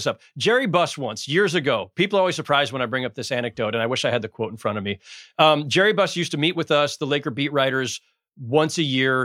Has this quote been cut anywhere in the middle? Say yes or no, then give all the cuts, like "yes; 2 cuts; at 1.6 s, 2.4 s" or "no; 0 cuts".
no; 0 cuts